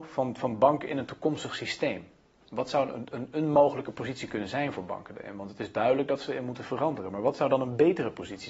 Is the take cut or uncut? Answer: uncut